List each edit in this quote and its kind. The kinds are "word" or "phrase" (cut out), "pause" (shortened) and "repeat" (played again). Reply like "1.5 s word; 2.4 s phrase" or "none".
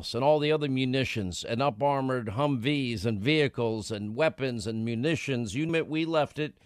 5.7 s word